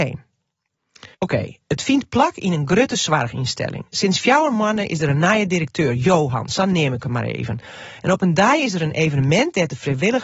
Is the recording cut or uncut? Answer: cut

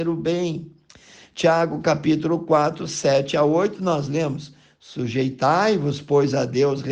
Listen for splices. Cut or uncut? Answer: uncut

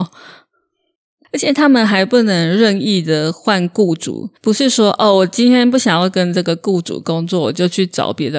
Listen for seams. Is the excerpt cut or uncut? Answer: cut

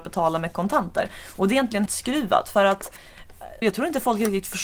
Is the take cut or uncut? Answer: cut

